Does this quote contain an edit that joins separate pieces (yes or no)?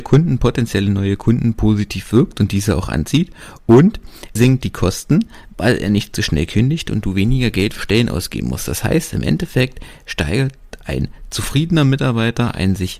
yes